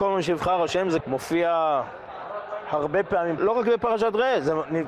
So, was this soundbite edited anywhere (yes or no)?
yes